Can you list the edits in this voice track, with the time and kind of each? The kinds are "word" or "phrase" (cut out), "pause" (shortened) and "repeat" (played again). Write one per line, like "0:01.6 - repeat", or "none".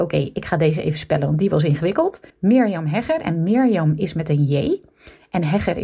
0:02.3 - pause